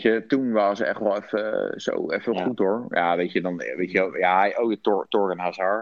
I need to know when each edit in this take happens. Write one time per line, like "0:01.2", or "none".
none